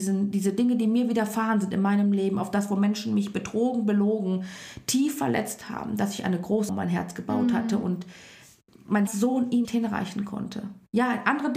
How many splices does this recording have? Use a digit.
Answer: 3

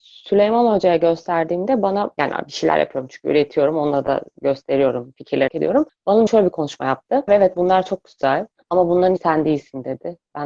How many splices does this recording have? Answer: 4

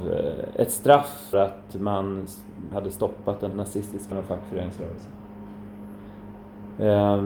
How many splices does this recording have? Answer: 4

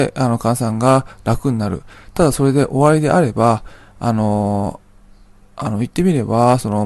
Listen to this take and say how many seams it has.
0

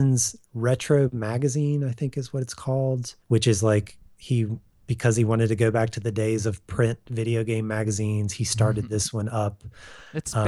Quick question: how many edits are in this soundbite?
1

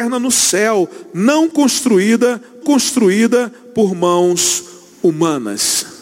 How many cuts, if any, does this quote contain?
1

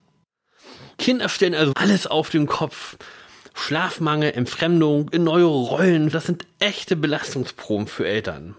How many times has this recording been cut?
4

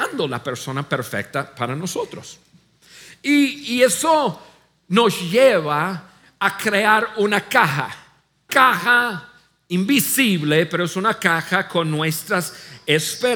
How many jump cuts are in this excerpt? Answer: 1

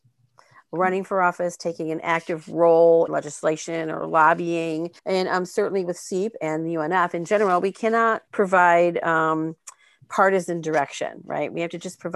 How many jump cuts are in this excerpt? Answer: 3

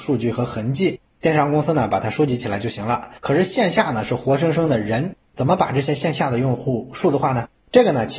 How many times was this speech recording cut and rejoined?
1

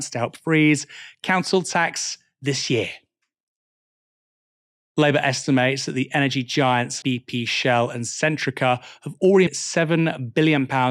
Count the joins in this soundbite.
2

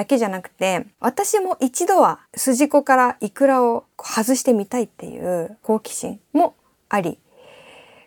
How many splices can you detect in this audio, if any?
4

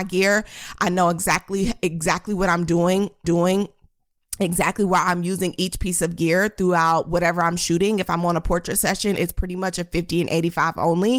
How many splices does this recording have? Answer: 1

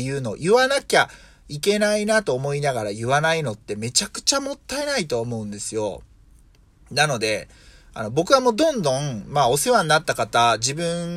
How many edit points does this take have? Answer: 0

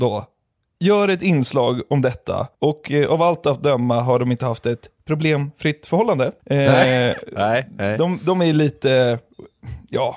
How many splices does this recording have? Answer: 2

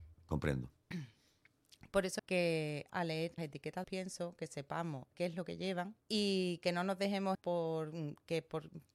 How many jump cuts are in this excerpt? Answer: 7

